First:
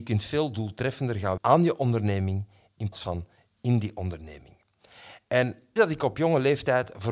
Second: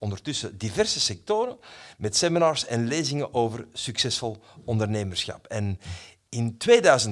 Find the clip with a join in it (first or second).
first